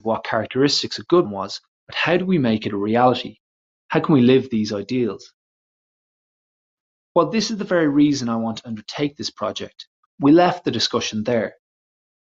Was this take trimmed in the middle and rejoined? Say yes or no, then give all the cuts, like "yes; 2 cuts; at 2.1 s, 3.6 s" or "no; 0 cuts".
yes; 1 cut; at 1.2 s